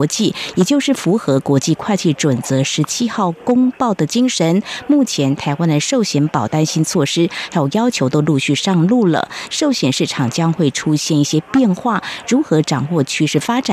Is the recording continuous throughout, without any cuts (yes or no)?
yes